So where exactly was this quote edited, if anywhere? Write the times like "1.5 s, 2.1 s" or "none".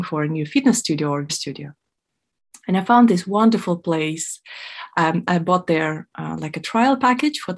1.3 s